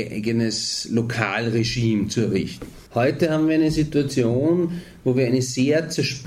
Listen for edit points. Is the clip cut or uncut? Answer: cut